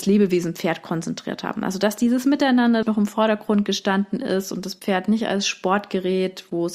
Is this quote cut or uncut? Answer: cut